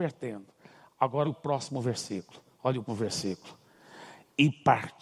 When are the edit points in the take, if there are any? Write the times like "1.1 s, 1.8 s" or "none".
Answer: 1.2 s, 2.9 s